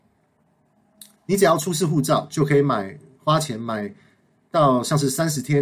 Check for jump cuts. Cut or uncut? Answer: uncut